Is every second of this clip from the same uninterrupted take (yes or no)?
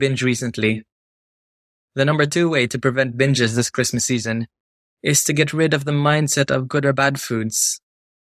yes